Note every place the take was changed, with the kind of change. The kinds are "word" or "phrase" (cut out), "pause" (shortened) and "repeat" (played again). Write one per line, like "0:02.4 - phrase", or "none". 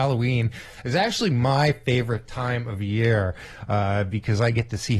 none